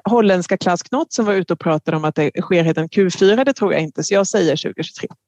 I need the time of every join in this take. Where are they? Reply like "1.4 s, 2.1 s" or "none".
none

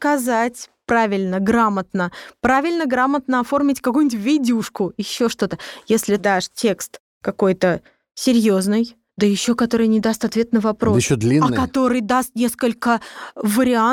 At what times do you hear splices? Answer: 6.2 s

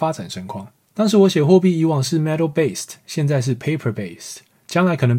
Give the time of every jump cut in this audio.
none

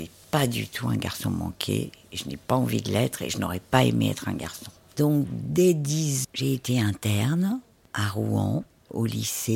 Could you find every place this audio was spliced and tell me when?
6.2 s

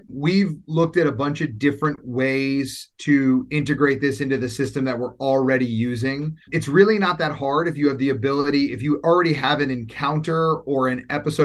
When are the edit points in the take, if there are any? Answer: 6.4 s

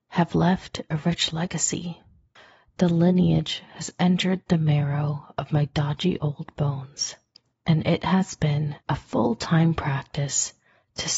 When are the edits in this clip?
2.4 s, 7.3 s, 8.8 s

